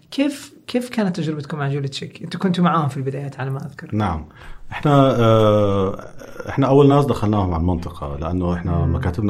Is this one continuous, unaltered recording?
yes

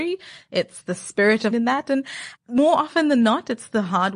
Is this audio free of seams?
no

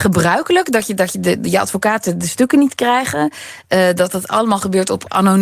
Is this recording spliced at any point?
no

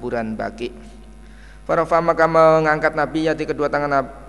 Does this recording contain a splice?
no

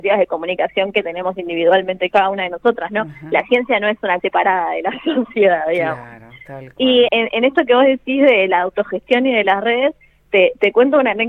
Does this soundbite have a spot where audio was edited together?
yes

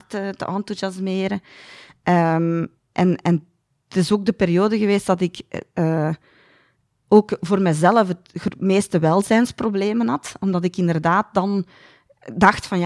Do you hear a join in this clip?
no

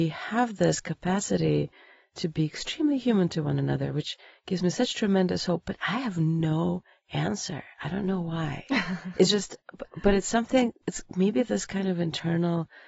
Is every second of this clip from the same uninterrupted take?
yes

